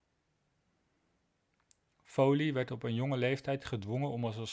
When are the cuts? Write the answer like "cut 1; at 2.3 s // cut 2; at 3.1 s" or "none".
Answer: none

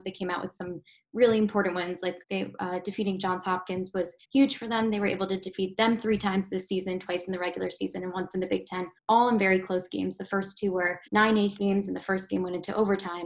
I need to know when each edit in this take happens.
cut 1; at 2.2 s // cut 2; at 4.2 s // cut 3; at 9.0 s // cut 4; at 11.1 s

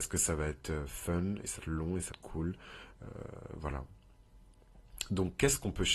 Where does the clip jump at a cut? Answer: cut 1; at 1.6 s // cut 2; at 2.1 s

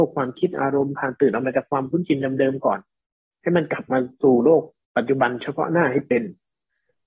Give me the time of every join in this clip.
none

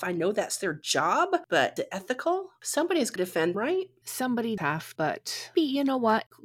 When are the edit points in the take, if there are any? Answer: cut 1; at 1.8 s // cut 2; at 3.2 s // cut 3; at 3.5 s // cut 4; at 4.6 s // cut 5; at 5.0 s // cut 6; at 5.5 s

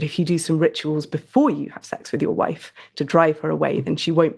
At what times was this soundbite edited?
none

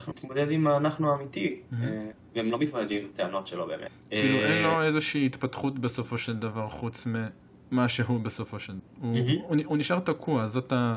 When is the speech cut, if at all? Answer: none

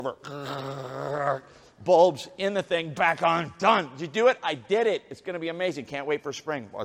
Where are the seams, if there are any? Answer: cut 1; at 2.9 s

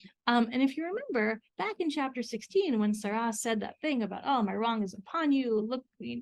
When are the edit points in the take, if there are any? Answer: cut 1; at 1.5 s

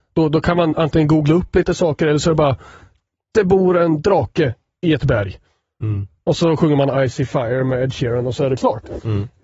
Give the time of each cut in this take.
none

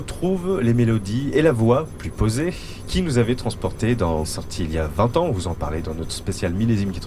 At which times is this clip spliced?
cut 1; at 4.2 s

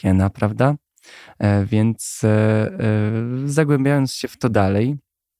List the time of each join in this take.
none

